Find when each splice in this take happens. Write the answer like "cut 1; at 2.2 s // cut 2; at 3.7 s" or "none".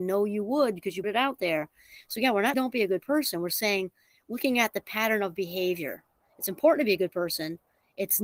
cut 1; at 1.0 s // cut 2; at 2.5 s